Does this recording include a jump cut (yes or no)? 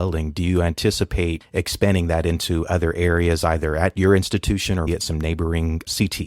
yes